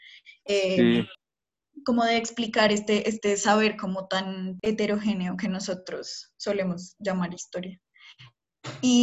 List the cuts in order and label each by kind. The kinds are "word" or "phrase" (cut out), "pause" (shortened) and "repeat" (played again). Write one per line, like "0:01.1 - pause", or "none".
none